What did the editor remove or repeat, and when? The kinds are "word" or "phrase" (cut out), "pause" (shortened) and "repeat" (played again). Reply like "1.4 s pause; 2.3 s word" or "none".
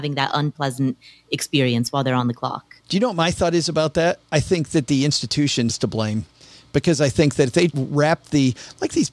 2.8 s pause; 5.7 s word; 7.7 s word